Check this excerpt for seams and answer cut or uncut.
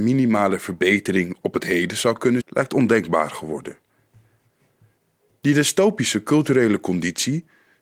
cut